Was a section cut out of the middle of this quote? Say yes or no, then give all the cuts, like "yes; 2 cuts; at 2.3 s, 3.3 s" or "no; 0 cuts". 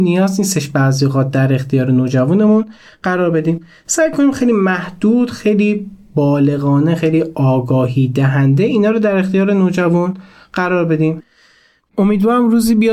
no; 0 cuts